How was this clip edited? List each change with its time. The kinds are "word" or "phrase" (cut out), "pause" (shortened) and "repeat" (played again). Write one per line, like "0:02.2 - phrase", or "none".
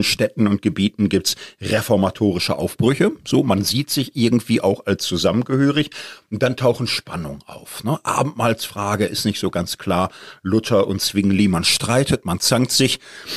none

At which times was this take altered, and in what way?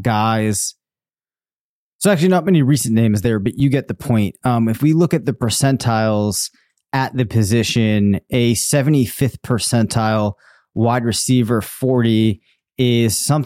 none

